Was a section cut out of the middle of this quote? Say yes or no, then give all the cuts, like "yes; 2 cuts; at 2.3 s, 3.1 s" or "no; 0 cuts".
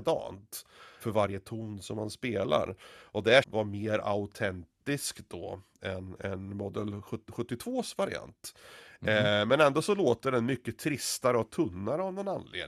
yes; 2 cuts; at 1.0 s, 3.4 s